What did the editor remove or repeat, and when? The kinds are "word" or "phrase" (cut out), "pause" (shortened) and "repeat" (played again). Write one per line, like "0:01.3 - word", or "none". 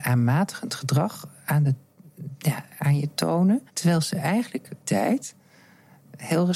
0:03.7 - pause
0:04.8 - phrase